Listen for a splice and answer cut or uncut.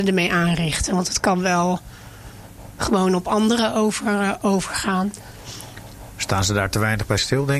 uncut